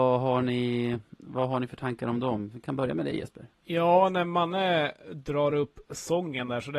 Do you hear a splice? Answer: yes; 1 cut; at 3.5 s

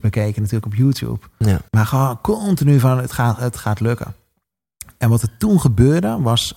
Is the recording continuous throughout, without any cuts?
no; 1 cut; at 1.7 s

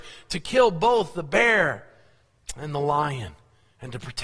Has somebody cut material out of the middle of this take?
no; 0 cuts

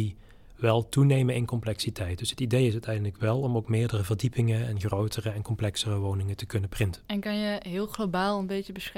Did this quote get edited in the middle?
yes; 1 cut; at 7.1 s

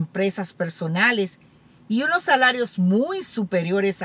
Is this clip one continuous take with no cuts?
yes; 0 cuts

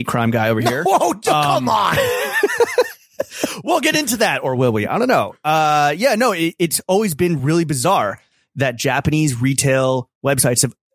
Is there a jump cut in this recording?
no; 0 cuts

